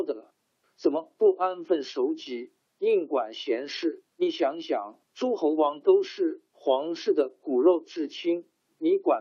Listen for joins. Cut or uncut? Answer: cut